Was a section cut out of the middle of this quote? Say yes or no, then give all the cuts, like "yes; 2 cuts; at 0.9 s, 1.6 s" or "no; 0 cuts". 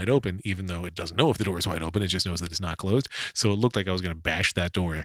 no; 0 cuts